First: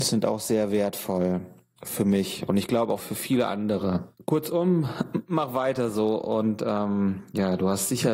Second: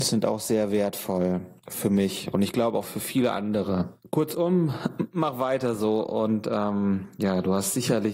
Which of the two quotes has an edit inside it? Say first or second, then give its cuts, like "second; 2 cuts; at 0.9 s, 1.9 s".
second; 1 cut; at 1.6 s